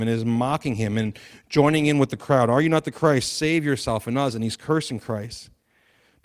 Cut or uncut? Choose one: uncut